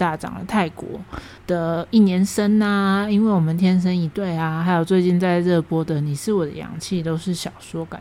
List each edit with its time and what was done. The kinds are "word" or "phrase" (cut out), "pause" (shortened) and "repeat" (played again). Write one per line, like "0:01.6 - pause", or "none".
0:01.4 - pause